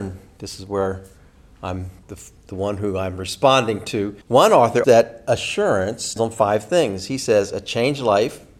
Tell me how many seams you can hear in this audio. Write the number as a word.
five